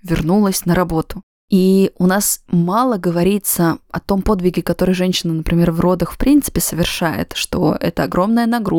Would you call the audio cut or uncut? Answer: uncut